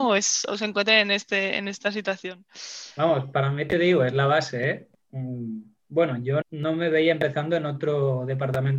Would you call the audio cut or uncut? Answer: cut